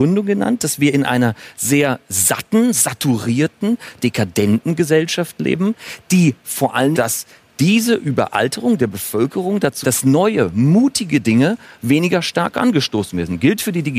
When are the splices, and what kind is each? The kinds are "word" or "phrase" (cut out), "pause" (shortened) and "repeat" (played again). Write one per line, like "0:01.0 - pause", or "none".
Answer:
0:04.0 - word
0:06.9 - phrase
0:09.8 - word